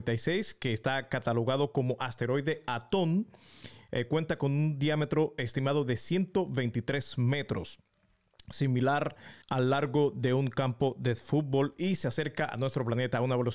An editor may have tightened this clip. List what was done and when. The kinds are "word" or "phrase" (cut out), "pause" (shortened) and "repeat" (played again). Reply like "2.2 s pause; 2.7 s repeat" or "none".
9.4 s pause